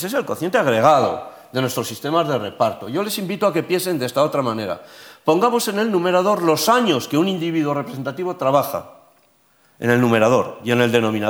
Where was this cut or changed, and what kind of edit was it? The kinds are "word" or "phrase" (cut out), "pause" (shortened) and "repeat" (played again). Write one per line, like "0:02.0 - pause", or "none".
none